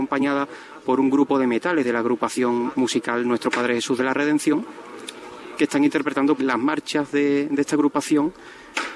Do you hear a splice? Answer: yes; 1 cut; at 6.4 s

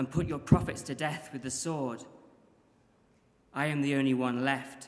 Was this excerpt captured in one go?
yes; 0 cuts

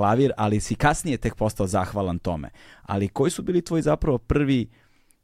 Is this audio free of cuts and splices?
yes; 0 cuts

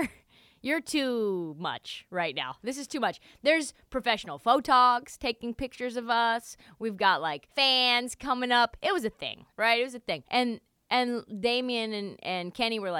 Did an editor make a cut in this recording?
yes; 3 cuts; at 7.5 s, 9.5 s, 10.3 s

